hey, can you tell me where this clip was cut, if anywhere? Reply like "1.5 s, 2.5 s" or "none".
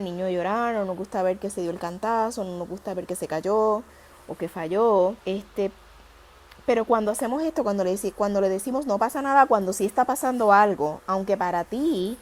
5.2 s